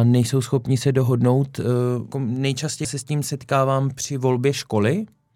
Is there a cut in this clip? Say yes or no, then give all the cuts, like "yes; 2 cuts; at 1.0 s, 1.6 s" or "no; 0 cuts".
yes; 2 cuts; at 2.1 s, 2.8 s